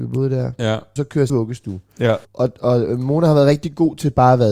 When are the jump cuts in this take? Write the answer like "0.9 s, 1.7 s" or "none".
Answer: 1.0 s, 1.3 s, 2.2 s